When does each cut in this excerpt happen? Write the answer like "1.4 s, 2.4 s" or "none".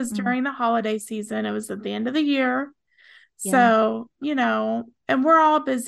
none